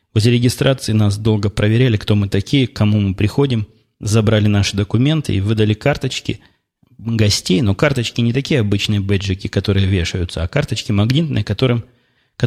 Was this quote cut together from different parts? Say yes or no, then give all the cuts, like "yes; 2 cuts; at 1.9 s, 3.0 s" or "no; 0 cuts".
no; 0 cuts